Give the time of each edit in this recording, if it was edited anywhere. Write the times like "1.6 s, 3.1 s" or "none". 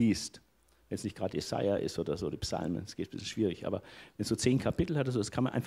none